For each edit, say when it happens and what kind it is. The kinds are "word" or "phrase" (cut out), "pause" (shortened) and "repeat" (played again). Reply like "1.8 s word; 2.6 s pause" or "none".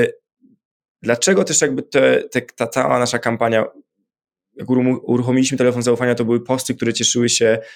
none